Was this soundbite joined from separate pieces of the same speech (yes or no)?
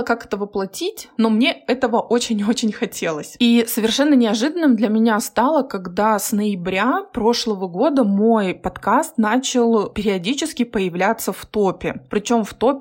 no